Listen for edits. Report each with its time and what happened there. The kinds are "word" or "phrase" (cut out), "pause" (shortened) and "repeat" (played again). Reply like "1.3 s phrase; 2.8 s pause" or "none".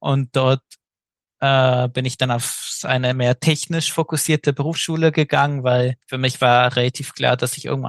6.0 s pause